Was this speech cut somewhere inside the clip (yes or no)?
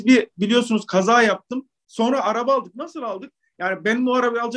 no